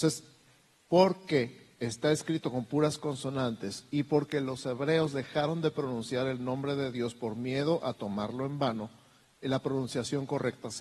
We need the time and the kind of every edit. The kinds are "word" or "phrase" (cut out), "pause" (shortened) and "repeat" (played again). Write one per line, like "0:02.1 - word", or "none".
none